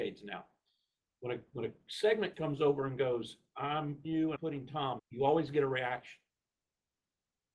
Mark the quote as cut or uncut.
cut